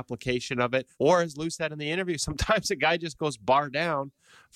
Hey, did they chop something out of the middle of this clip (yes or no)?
yes